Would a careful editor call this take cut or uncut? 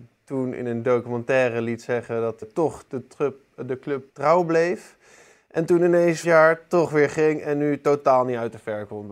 cut